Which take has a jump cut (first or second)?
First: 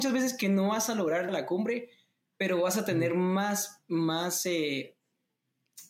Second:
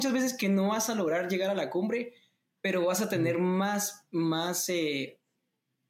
first